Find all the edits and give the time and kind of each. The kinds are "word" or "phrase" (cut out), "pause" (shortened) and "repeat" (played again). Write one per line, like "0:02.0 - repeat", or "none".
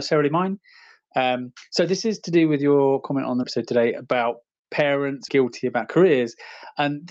0:03.4 - word
0:05.3 - word

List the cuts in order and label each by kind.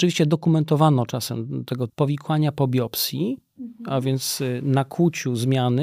0:01.9 - phrase

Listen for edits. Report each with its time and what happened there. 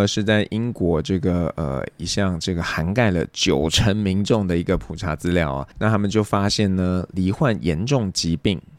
0:05.7 - pause

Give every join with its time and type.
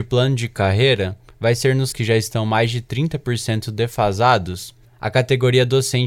0:01.9 - word

